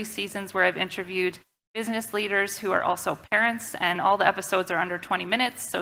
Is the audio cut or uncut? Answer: uncut